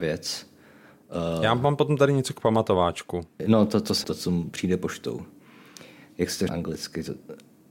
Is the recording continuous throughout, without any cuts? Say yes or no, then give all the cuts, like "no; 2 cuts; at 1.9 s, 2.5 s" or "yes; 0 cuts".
no; 2 cuts; at 4.0 s, 6.5 s